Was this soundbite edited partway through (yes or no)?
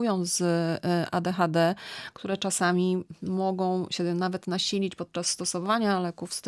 no